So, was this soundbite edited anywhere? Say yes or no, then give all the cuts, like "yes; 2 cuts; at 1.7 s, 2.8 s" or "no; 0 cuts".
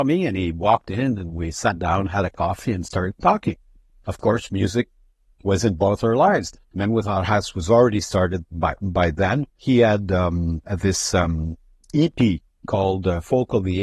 yes; 1 cut; at 9.5 s